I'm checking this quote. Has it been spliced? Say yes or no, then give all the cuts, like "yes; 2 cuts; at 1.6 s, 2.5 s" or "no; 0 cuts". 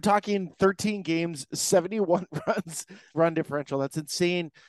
yes; 1 cut; at 3.1 s